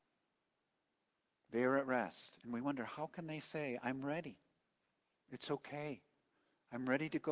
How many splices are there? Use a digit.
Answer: 0